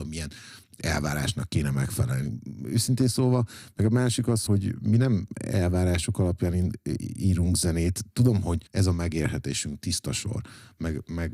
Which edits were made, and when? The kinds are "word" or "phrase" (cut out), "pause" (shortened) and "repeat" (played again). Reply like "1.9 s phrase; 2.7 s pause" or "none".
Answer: 4.5 s word; 8.7 s pause